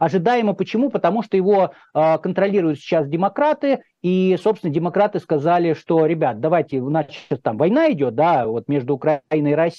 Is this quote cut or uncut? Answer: uncut